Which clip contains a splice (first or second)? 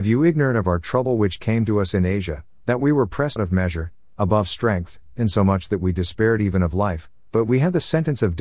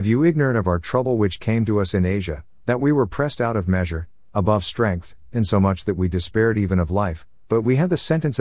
first